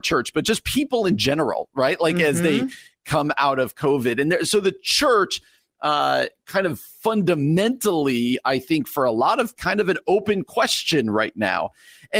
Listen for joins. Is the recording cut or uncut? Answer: cut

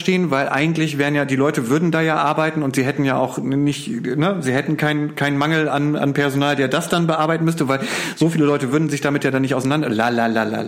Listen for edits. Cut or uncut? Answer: uncut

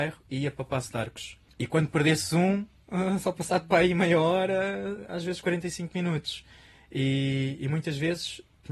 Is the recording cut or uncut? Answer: uncut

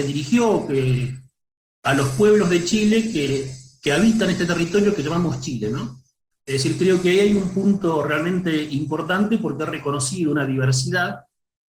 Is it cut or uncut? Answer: uncut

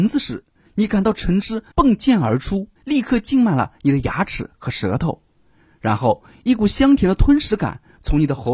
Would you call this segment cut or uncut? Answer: cut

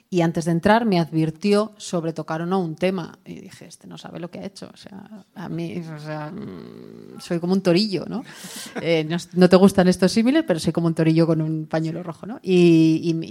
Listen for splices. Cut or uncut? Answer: uncut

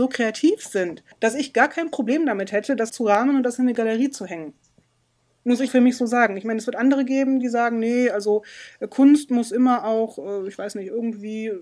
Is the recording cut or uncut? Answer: cut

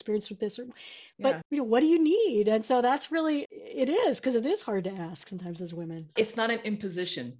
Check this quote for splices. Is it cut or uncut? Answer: uncut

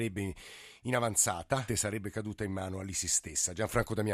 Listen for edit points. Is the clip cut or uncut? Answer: cut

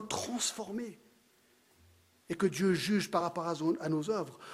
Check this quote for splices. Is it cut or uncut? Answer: uncut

